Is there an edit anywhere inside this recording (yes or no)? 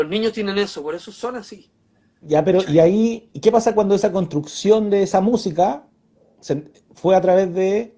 no